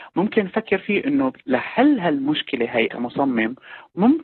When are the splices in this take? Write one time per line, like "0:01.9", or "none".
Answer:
0:02.9